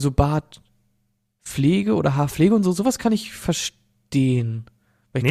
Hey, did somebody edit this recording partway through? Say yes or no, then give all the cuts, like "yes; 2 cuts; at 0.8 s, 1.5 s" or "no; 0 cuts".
no; 0 cuts